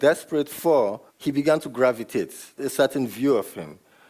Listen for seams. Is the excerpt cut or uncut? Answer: cut